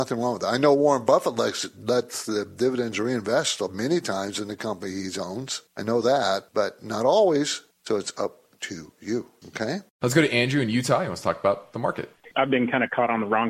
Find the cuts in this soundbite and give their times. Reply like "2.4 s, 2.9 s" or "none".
5.7 s, 6.5 s, 7.7 s

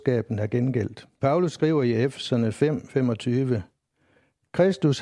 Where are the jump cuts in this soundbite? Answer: 1.1 s

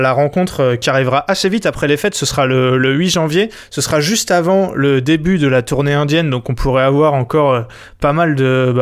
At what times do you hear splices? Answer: none

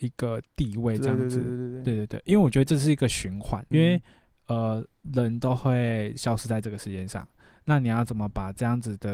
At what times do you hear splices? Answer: 3.7 s

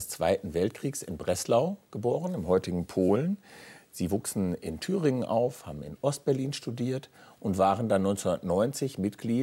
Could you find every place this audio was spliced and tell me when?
none

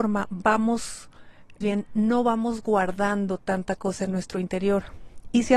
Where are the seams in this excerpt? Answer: 1.6 s

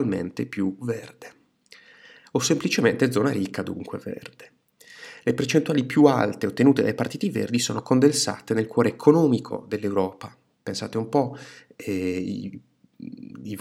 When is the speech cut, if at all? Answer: none

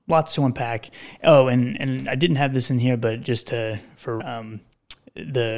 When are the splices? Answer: 4.2 s

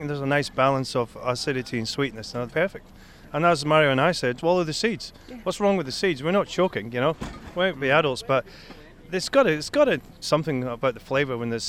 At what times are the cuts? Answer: 2.5 s, 4.4 s, 10.2 s

